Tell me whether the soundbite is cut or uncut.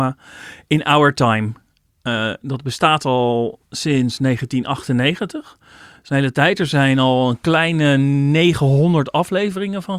uncut